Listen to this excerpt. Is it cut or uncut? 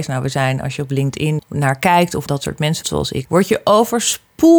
cut